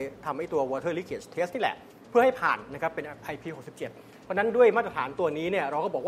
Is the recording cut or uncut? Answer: uncut